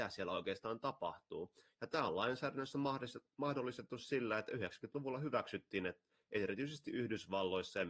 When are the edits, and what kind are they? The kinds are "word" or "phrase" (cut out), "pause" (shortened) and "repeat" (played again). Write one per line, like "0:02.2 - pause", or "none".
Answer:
none